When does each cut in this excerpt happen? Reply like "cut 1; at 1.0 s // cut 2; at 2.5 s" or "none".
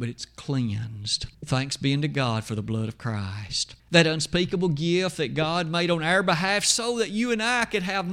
cut 1; at 1.3 s // cut 2; at 3.8 s